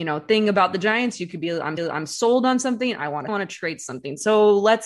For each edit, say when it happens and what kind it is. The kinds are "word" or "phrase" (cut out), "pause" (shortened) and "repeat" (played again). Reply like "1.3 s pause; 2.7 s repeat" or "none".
1.8 s repeat; 3.3 s phrase

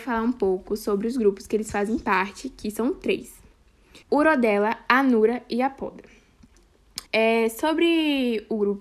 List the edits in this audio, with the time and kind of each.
4.0 s pause; 7.1 s pause

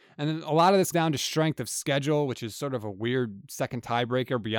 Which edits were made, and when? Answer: 0.9 s word

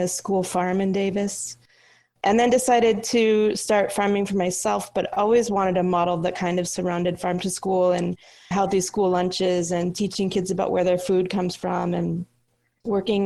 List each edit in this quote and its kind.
8.5 s word

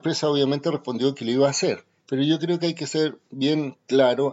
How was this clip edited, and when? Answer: 2.0 s pause

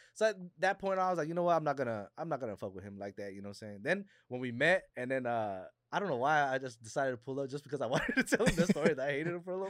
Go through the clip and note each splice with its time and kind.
4.9 s pause

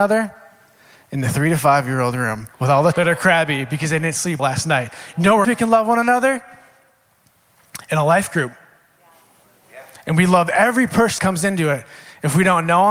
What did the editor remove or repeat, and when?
2.5 s pause; 2.9 s word; 4.4 s word; 5.4 s word; 11.2 s word

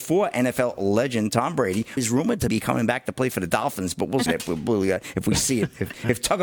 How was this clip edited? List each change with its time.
2.0 s word; 2.5 s word; 4.3 s word

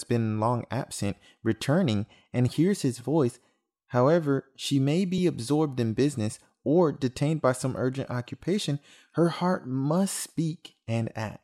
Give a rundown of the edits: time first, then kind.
none

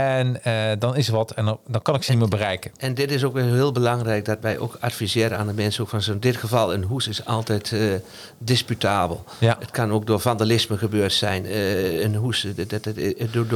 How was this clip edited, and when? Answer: none

